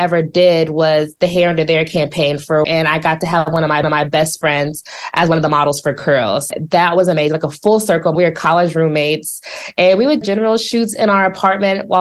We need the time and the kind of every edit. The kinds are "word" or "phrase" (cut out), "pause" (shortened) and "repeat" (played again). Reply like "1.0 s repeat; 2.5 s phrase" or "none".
2.6 s word; 3.8 s repeat; 6.5 s word; 8.2 s word; 10.2 s phrase

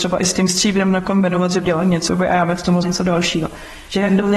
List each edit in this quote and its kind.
1.6 s word; 2.1 s word; 2.8 s phrase

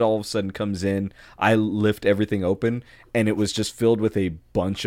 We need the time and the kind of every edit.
none

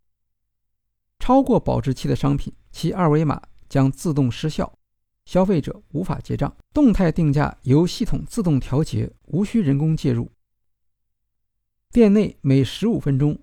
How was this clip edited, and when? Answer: 2.6 s pause; 6.6 s pause; 9.2 s pause

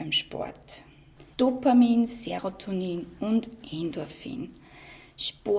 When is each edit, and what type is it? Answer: 1.3 s pause

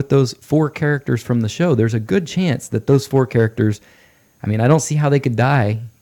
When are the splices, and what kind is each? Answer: none

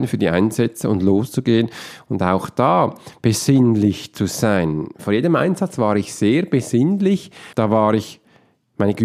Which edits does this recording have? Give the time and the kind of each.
7.5 s pause

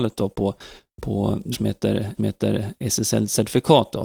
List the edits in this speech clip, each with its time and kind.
1.5 s word; 2.2 s repeat

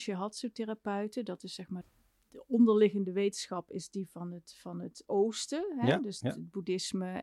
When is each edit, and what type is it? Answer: none

